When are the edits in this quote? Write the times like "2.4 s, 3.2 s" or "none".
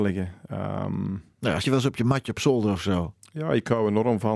1.6 s